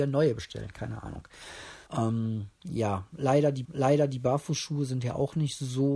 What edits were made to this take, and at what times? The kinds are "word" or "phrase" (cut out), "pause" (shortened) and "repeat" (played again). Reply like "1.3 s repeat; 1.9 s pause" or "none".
1.9 s pause; 3.6 s repeat